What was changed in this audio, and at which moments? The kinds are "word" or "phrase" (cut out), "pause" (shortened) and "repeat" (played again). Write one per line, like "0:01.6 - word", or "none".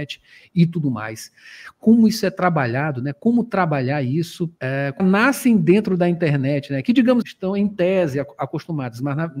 0:04.6 - pause
0:05.0 - phrase
0:07.2 - word

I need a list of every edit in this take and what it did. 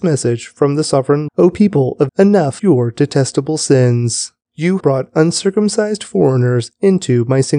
0:01.3 - word
0:02.1 - word
0:02.6 - word
0:04.8 - word

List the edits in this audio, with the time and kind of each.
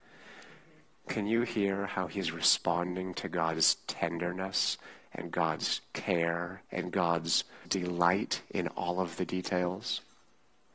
0:06.6 - pause
0:07.6 - word

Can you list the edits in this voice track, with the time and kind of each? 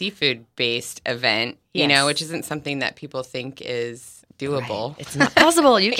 none

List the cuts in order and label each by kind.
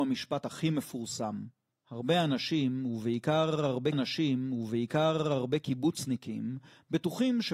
0:01.7 - pause
0:03.9 - repeat

